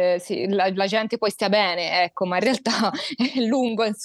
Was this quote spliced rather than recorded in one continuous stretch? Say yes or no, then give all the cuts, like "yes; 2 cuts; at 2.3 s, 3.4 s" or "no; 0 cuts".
no; 0 cuts